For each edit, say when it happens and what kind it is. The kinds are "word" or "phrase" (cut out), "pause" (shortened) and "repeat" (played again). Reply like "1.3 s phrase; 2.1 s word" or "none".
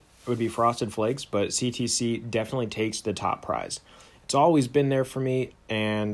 none